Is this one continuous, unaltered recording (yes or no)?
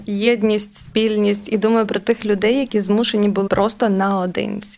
no